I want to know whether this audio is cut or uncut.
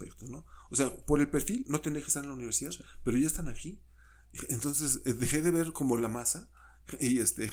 uncut